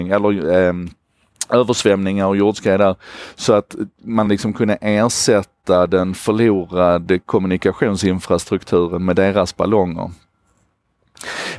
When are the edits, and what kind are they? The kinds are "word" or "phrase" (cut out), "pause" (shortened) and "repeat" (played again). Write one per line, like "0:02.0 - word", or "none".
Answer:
none